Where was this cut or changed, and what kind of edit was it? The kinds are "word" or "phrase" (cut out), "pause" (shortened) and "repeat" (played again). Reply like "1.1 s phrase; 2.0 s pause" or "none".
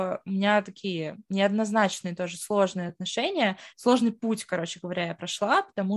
none